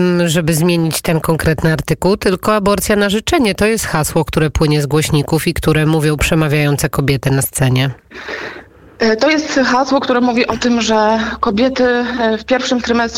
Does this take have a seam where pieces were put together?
no; 0 cuts

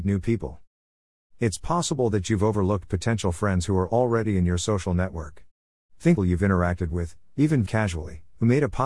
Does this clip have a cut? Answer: yes; 2 cuts; at 6.2 s, 7.7 s

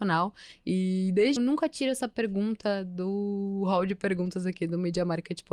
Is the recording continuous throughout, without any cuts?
no; 1 cut; at 1.4 s

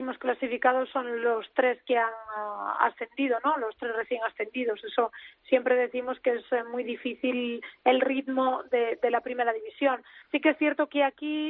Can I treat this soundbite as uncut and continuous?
no; 1 cut; at 10.3 s

